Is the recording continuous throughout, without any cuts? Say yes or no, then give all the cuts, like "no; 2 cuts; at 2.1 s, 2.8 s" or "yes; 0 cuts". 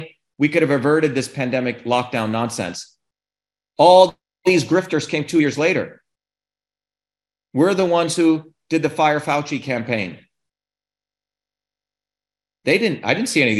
yes; 0 cuts